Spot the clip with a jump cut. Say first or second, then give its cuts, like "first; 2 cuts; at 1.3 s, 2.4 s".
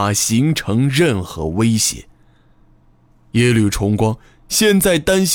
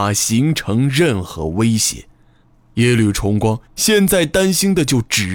second; 2 cuts; at 2.4 s, 3.6 s